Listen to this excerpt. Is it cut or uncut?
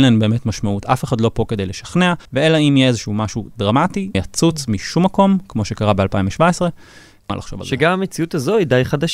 cut